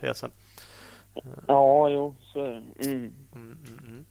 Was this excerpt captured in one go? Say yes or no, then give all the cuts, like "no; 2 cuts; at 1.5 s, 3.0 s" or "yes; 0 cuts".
yes; 0 cuts